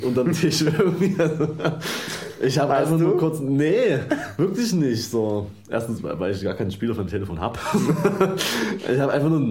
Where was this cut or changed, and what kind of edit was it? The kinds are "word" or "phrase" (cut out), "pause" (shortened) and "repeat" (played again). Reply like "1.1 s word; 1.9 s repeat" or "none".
none